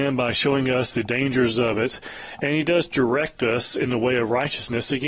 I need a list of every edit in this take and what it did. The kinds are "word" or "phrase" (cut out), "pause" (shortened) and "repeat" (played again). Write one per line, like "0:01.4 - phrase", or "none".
none